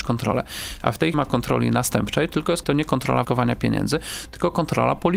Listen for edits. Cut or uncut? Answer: cut